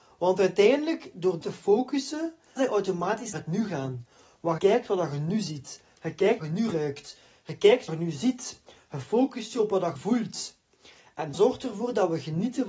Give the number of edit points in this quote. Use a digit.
8